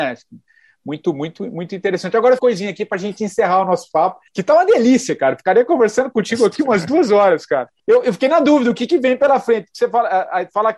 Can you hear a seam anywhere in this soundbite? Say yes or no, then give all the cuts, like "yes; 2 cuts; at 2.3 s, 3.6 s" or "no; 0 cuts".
yes; 3 cuts; at 2.4 s, 4.3 s, 7.8 s